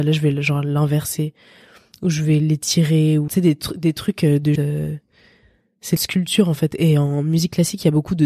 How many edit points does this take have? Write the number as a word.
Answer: three